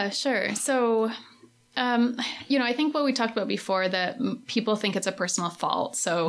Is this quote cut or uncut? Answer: uncut